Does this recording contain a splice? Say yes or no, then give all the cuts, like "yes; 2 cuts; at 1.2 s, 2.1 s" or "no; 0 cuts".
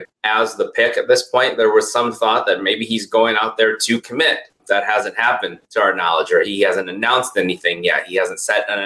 no; 0 cuts